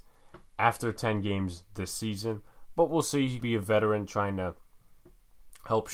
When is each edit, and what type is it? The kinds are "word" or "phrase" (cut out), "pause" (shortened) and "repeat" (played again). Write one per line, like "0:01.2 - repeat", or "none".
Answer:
0:03.4 - word